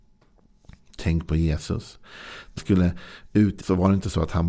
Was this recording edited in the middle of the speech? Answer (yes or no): yes